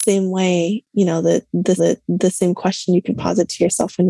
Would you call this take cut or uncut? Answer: cut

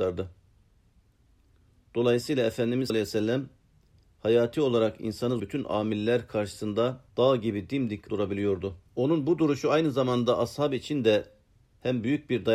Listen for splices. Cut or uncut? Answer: cut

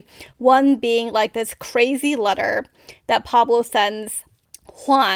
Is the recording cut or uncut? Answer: uncut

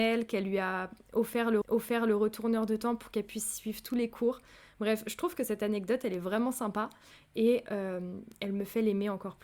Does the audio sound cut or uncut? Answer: cut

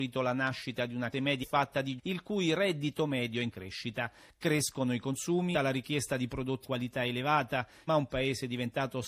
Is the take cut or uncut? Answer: cut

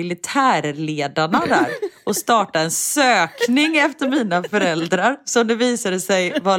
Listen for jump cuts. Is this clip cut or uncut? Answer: uncut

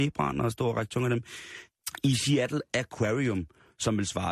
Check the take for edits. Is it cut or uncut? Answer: uncut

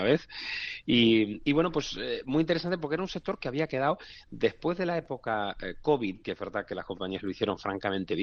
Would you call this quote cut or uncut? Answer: uncut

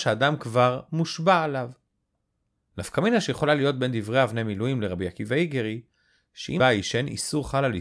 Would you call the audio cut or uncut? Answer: cut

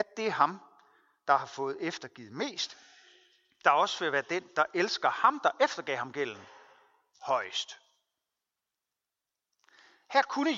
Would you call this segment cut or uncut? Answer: uncut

